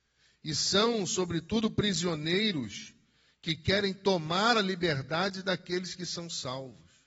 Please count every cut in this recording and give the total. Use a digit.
0